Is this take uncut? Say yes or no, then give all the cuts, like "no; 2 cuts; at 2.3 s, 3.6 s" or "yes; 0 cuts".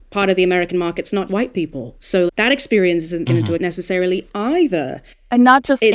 no; 4 cuts; at 1.3 s, 2.3 s, 3.3 s, 3.6 s